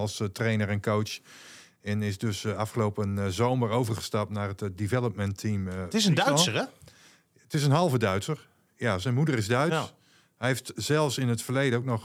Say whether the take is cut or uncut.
uncut